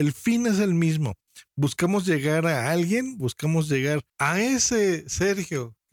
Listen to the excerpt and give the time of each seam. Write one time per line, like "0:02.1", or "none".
0:04.1